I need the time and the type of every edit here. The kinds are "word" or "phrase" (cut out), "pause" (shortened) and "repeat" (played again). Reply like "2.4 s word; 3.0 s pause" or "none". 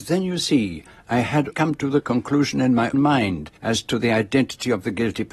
1.5 s word; 2.9 s word; 3.6 s pause